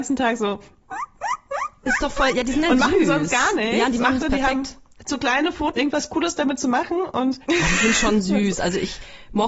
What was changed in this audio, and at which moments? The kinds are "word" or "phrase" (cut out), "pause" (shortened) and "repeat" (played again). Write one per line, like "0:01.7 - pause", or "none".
0:04.2 - phrase
0:05.8 - word
0:07.4 - pause

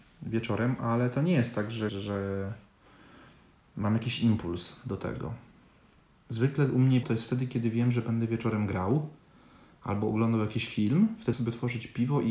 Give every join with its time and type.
0:01.9 - word
0:07.0 - word
0:11.3 - word

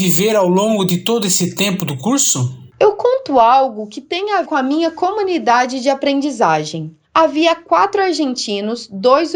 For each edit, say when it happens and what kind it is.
0:02.7 - pause
0:04.4 - word
0:07.0 - pause

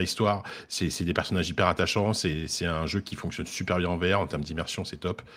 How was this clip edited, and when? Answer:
none

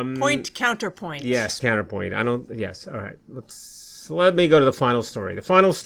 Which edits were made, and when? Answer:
0:01.6 - word

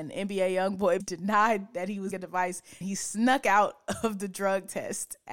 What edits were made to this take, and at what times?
0:01.0 - word
0:02.1 - word
0:02.8 - word

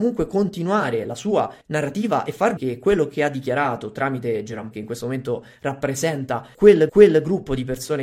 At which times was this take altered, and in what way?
0:01.6 - pause
0:02.6 - word
0:04.7 - word
0:06.9 - repeat

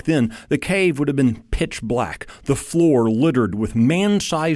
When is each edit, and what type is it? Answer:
none

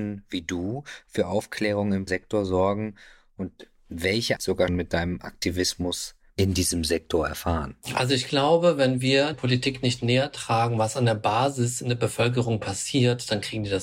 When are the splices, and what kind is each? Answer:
0:02.1 - word
0:04.4 - phrase
0:04.7 - word
0:09.3 - word

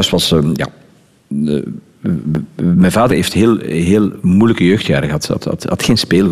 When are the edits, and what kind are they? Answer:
0:03.1 - phrase

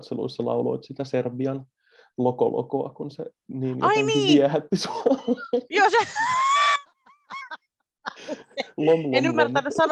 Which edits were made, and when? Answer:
none

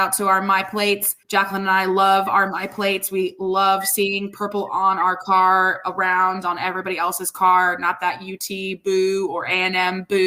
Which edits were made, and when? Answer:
0:01.2 - pause

